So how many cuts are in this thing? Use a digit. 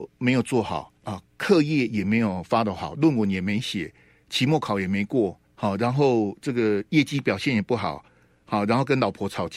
2